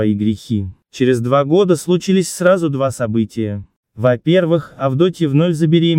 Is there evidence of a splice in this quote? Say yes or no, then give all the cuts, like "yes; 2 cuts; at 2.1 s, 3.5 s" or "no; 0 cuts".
no; 0 cuts